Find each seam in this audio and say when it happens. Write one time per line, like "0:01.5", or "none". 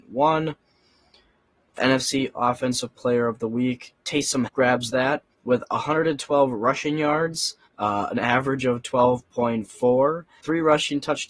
0:01.8
0:04.5
0:05.3
0:07.7
0:10.4